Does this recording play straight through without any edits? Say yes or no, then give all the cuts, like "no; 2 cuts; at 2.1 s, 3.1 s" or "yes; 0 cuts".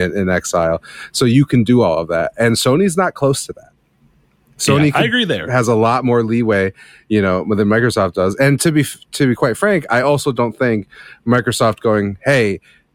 yes; 0 cuts